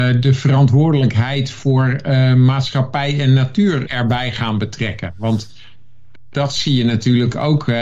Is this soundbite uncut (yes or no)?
no